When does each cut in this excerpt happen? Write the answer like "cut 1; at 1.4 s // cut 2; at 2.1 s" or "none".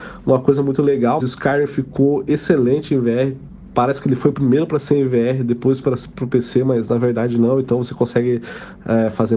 cut 1; at 1.2 s // cut 2; at 4.3 s